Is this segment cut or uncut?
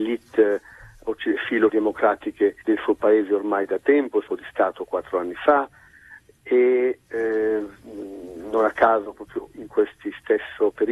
cut